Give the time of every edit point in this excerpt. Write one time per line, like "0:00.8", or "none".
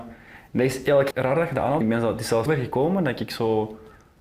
0:01.1
0:01.8
0:02.5